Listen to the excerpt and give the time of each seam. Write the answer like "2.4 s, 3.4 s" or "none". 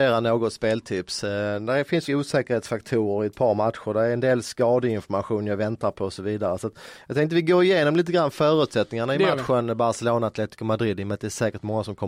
2.1 s